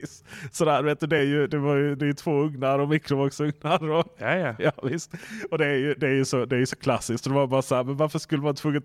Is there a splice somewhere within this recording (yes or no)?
no